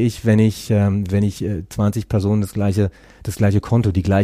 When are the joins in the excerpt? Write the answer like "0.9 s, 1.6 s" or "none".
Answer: none